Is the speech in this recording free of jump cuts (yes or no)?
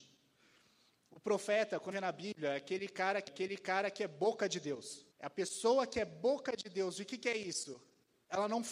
no